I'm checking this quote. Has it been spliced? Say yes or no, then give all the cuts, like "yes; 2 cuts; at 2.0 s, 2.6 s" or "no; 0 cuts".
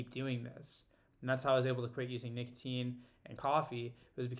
no; 0 cuts